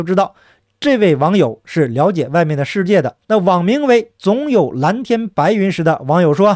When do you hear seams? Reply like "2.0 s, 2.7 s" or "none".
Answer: 3.2 s